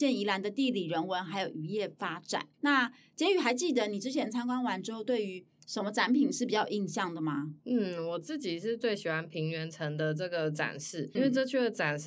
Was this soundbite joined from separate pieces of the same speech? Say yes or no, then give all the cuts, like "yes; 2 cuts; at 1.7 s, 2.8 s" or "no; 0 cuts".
yes; 3 cuts; at 2.5 s, 7.6 s, 11.1 s